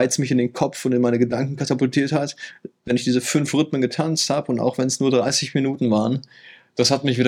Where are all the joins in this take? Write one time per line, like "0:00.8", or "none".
none